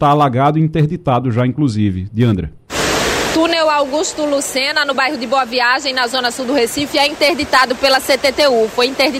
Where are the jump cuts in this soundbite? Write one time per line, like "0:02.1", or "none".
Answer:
none